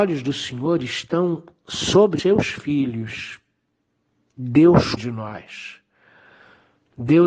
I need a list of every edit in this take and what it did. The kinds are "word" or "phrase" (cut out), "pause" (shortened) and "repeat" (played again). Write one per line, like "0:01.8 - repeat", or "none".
0:02.2 - word
0:05.0 - word